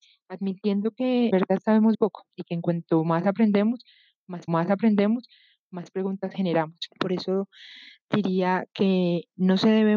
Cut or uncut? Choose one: cut